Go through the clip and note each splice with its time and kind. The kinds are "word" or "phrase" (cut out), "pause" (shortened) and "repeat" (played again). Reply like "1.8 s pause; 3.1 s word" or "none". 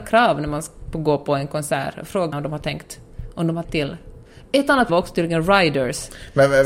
2.3 s word; 3.6 s word; 4.9 s word